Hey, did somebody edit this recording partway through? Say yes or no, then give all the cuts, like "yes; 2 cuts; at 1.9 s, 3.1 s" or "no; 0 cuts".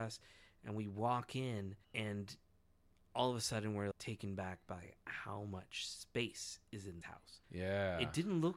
yes; 4 cuts; at 1.8 s, 3.9 s, 7.0 s, 7.4 s